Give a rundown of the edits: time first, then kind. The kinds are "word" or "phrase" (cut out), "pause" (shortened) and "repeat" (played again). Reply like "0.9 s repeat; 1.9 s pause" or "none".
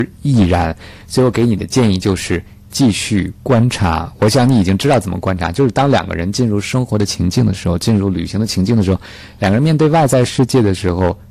none